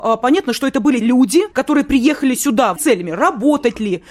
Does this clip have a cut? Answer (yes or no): yes